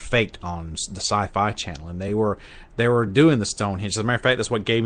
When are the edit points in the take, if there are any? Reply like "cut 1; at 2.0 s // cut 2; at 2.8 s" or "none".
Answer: none

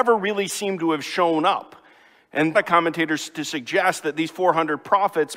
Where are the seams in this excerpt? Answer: cut 1; at 2.5 s

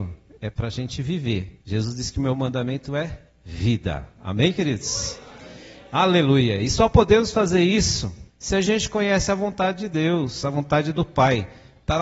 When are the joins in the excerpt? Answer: cut 1; at 1.6 s // cut 2; at 8.3 s

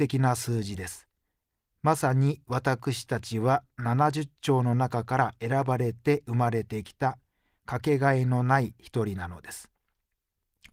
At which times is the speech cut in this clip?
none

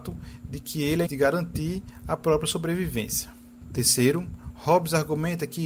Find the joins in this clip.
cut 1; at 1.1 s

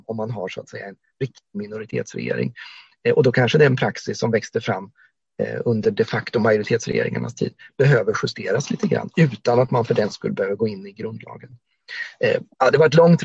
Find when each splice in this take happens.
none

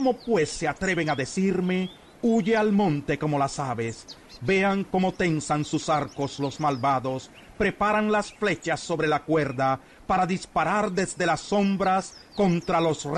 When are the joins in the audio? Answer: none

